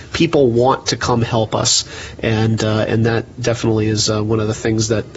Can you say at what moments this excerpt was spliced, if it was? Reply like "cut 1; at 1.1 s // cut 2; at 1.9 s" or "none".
none